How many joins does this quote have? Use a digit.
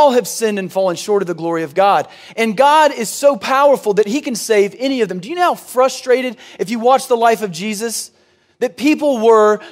0